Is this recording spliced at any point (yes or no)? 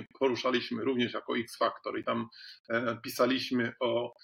no